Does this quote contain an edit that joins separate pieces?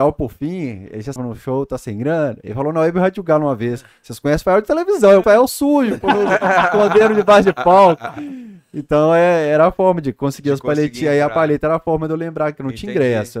yes; 2 cuts; at 1.2 s, 5.2 s

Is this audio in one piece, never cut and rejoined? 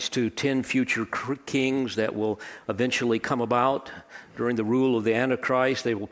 yes; 0 cuts

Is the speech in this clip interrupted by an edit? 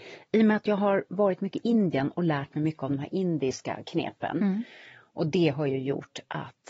no; 0 cuts

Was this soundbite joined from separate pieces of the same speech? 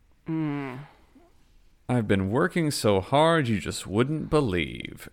no; 0 cuts

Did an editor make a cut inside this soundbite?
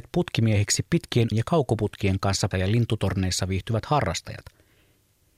yes; 2 cuts; at 1.3 s, 2.5 s

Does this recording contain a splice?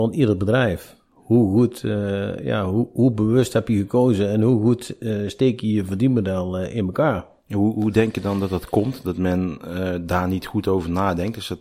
no; 0 cuts

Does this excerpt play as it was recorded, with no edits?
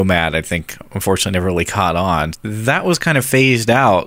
no; 1 cut; at 2.3 s

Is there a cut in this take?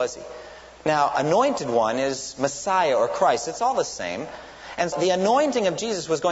yes; 1 cut; at 4.9 s

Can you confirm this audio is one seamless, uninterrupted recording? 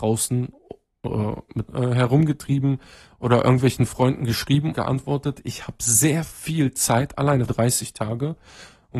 no; 3 cuts; at 1.7 s, 4.7 s, 7.5 s

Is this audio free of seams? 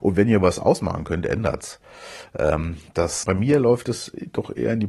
no; 1 cut; at 3.2 s

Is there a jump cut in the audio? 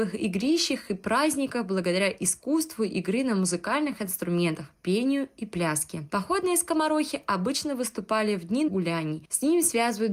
yes; 1 cut; at 8.7 s

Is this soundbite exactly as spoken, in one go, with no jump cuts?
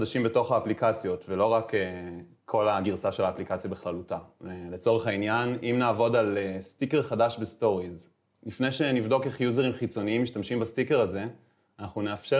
yes; 0 cuts

